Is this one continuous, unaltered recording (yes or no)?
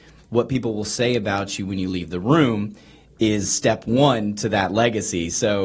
yes